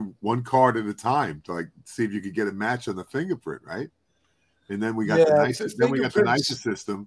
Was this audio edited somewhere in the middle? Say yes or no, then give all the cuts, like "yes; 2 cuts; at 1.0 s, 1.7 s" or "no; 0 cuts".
no; 0 cuts